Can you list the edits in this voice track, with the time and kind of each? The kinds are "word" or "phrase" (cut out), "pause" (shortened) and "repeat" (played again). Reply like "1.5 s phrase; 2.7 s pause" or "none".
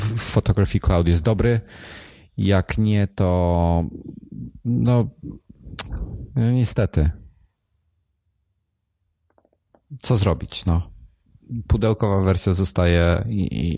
none